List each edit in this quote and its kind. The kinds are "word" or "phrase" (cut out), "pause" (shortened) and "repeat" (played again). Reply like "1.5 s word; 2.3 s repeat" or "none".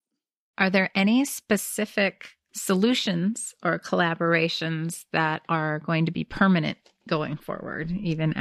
none